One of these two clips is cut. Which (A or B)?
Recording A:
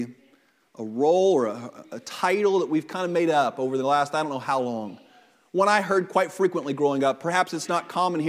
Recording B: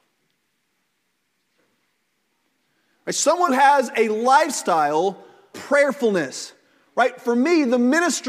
B